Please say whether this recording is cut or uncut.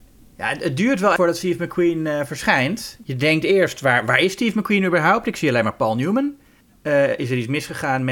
cut